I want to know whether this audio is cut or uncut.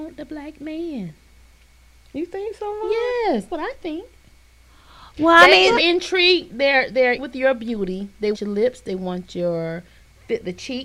cut